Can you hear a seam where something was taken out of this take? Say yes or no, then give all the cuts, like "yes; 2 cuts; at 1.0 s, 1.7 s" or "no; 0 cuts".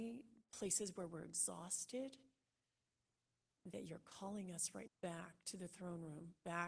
yes; 1 cut; at 4.9 s